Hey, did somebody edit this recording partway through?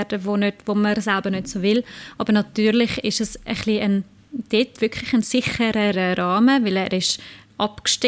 no; 0 cuts

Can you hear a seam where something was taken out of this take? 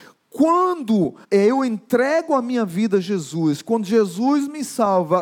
yes; 1 cut; at 1.2 s

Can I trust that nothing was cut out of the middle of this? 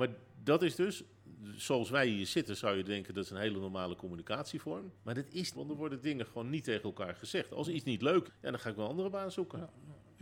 no; 3 cuts; at 5.0 s, 5.5 s, 8.3 s

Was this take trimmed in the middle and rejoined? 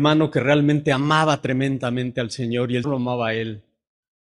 yes; 1 cut; at 2.8 s

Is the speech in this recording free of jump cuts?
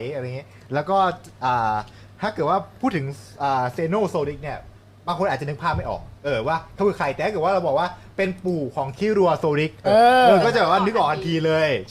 no; 1 cut; at 9.8 s

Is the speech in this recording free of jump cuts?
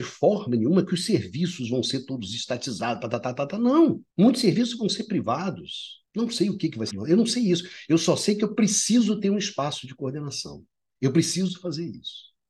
no; 3 cuts; at 4.1 s, 6.1 s, 6.9 s

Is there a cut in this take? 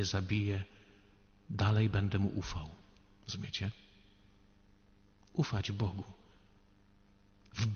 no; 0 cuts

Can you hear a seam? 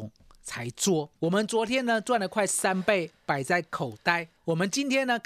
yes; 2 cuts; at 1.2 s, 4.4 s

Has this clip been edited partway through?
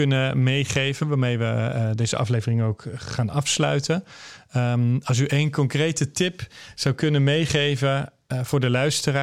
no; 0 cuts

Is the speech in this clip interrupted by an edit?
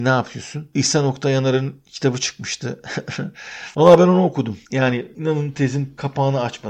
yes; 1 cut; at 4.7 s

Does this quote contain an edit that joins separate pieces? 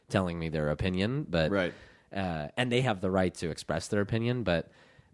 no; 0 cuts

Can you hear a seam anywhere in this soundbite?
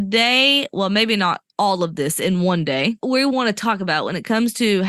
yes; 2 cuts; at 1.5 s, 3.0 s

